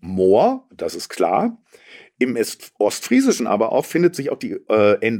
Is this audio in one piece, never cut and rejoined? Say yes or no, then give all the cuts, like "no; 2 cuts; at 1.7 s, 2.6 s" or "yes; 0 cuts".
yes; 0 cuts